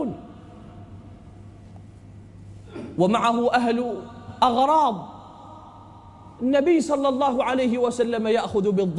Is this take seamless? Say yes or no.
yes